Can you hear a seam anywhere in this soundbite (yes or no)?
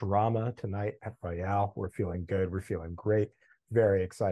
no